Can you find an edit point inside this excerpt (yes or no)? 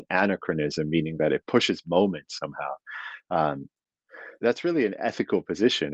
yes